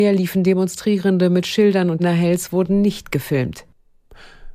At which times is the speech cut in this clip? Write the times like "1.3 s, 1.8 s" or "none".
2.0 s